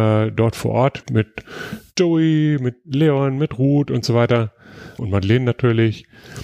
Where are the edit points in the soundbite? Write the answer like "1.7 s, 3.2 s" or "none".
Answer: 1.0 s, 5.0 s